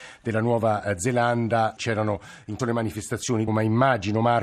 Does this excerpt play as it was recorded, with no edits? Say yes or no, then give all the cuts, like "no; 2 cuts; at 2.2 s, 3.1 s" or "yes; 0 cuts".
no; 3 cuts; at 1.8 s, 2.6 s, 3.5 s